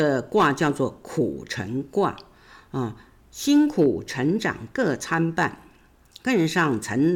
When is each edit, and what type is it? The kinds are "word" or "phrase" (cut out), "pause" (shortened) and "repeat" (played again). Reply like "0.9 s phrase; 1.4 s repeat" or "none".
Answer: none